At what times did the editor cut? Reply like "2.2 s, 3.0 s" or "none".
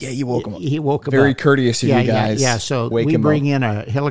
2.9 s